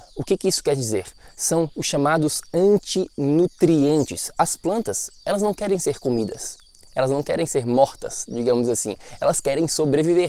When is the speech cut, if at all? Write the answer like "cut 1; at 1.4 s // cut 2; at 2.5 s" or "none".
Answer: none